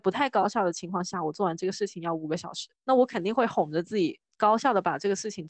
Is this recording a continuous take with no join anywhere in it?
no; 1 cut; at 2.7 s

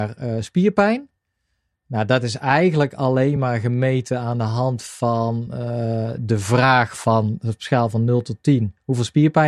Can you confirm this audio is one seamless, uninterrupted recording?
yes; 0 cuts

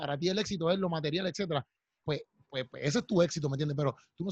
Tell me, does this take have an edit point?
no; 0 cuts

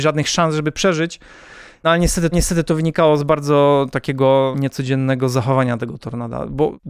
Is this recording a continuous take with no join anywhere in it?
no; 1 cut; at 2.3 s

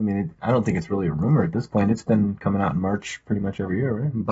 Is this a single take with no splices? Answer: yes; 0 cuts

